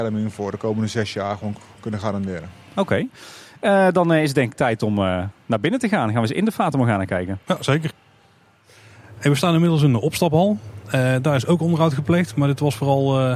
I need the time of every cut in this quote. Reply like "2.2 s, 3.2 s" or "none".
none